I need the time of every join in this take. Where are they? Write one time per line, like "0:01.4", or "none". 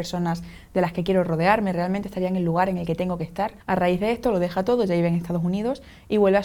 0:03.6

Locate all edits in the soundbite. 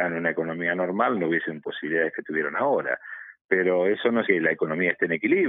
0:01.6
0:04.2

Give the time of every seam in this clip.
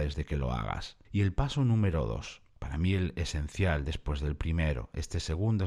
0:01.0
0:02.5

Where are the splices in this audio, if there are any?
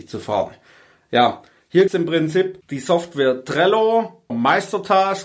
0:01.9
0:04.3

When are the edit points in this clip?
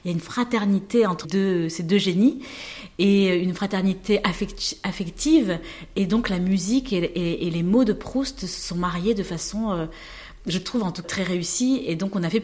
0:01.2
0:11.0

